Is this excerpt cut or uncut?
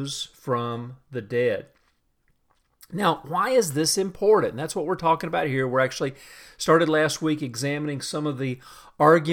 uncut